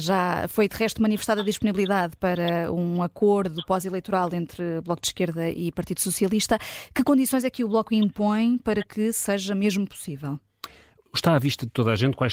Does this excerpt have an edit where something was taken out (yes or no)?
no